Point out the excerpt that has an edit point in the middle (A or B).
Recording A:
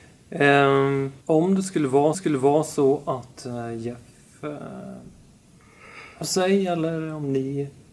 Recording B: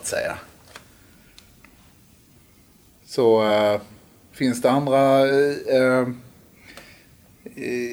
A